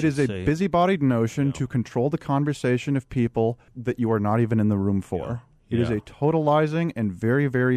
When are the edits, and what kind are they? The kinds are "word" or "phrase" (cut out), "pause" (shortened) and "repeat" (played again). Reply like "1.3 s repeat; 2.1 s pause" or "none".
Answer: 3.7 s pause